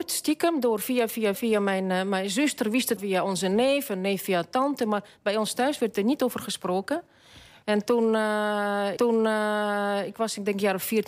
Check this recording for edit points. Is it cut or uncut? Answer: cut